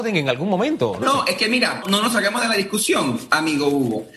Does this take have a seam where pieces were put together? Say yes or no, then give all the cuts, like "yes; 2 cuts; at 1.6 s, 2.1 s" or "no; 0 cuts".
yes; 2 cuts; at 1.0 s, 1.8 s